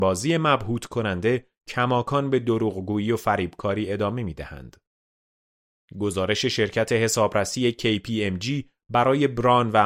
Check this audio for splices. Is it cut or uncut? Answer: uncut